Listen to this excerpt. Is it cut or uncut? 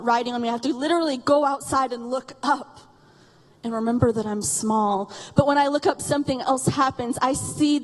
uncut